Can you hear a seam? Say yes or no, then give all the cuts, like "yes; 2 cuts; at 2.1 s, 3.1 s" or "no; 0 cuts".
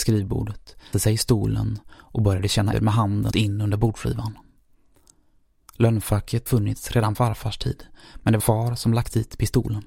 yes; 6 cuts; at 0.9 s, 2.7 s, 3.3 s, 6.5 s, 7.1 s, 8.4 s